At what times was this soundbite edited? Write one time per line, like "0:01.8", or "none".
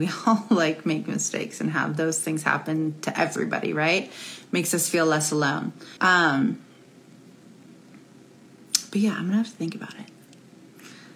0:06.0

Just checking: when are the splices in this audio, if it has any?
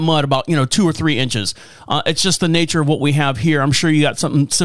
none

